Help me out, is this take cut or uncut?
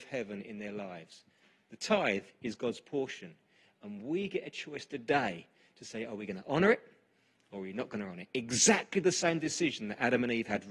uncut